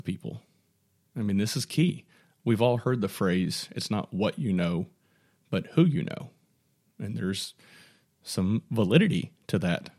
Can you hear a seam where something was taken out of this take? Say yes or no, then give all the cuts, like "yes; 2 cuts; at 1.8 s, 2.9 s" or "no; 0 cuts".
no; 0 cuts